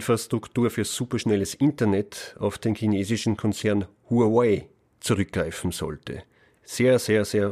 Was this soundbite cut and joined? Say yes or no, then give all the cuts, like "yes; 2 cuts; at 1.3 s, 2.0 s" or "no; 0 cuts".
no; 0 cuts